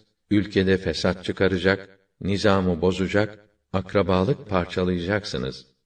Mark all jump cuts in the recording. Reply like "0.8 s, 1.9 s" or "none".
4.4 s